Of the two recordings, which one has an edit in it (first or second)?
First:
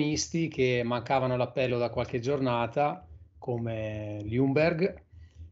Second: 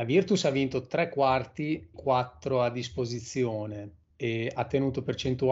second